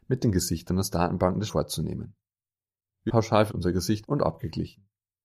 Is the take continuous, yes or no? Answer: no